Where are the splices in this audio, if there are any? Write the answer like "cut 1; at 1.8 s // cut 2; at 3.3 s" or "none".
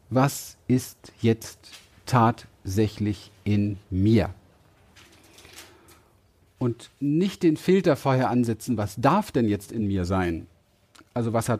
none

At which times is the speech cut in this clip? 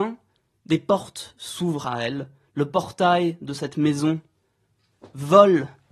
none

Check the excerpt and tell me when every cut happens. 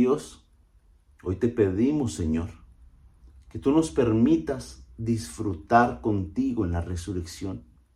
cut 1; at 2.8 s

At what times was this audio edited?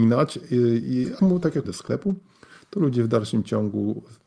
cut 1; at 1.2 s // cut 2; at 1.6 s

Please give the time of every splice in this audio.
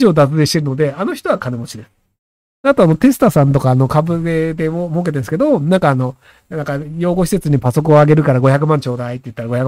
none

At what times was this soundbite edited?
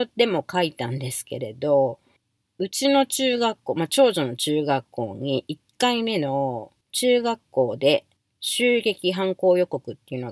cut 1; at 2.2 s // cut 2; at 6.8 s // cut 3; at 8.2 s

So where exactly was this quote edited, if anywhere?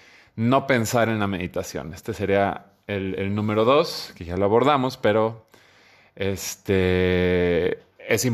none

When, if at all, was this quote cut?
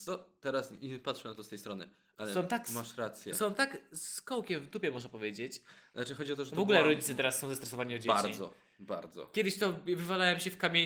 none

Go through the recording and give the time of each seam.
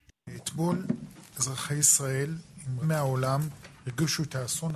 cut 1; at 2.8 s

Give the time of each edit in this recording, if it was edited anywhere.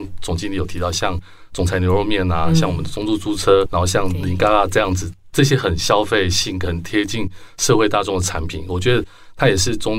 none

